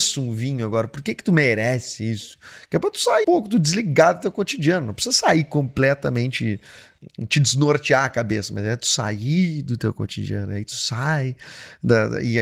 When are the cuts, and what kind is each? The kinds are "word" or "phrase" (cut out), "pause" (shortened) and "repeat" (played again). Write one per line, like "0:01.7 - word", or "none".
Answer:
0:03.2 - word